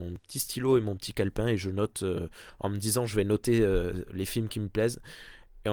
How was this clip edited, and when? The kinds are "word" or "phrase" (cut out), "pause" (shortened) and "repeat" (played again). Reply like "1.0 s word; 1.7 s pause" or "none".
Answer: none